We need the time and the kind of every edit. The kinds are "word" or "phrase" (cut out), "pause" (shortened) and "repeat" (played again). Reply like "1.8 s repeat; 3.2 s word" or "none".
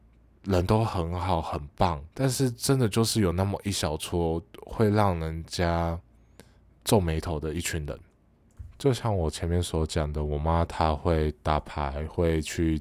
2.1 s pause